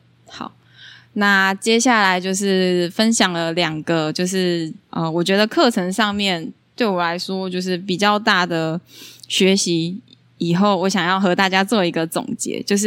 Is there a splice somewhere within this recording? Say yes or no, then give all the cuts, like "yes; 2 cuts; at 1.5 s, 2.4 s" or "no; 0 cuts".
yes; 1 cut; at 4.8 s